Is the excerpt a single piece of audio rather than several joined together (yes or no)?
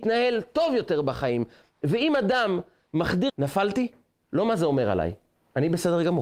no